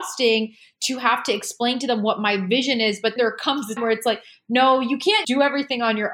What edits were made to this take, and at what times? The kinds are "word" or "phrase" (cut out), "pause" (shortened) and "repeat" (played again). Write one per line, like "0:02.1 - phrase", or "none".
0:03.2 - word
0:03.8 - word
0:05.2 - word